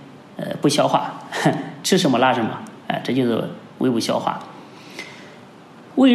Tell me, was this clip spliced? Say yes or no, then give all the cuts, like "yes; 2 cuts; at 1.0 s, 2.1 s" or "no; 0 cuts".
yes; 1 cut; at 2.8 s